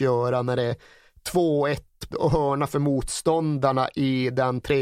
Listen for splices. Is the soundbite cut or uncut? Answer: cut